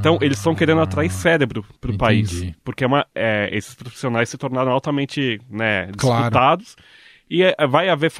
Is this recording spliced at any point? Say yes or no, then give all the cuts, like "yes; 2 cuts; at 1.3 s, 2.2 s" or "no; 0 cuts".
no; 0 cuts